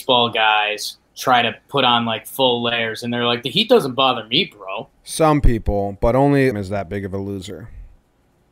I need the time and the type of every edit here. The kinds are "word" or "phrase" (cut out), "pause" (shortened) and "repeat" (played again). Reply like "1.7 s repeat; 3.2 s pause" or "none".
1.1 s pause; 4.9 s pause; 6.5 s phrase